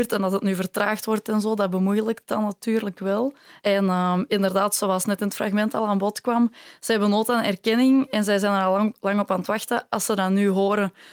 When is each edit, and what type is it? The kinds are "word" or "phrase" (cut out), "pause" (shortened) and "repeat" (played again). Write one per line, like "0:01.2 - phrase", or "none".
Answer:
0:03.5 - pause